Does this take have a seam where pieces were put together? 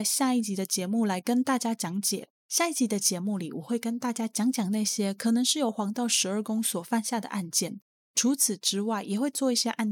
yes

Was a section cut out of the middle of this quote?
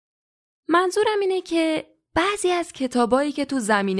no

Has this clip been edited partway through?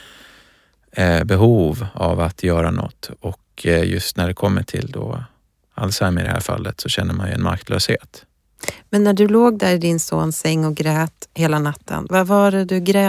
no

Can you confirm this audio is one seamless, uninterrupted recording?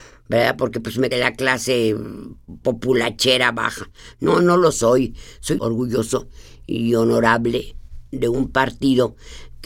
no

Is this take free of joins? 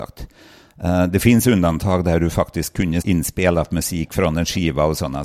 no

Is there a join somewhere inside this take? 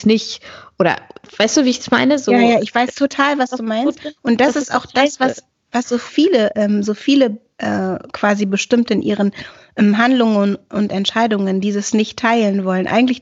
no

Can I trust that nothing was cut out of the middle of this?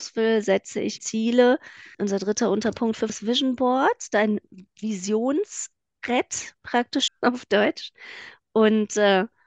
no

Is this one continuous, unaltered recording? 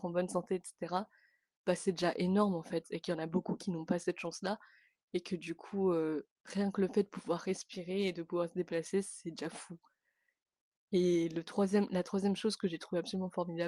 yes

